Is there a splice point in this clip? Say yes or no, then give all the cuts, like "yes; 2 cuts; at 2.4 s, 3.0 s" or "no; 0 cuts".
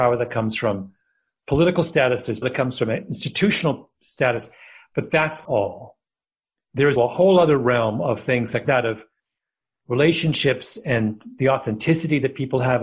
yes; 4 cuts; at 2.4 s, 5.4 s, 7.0 s, 8.6 s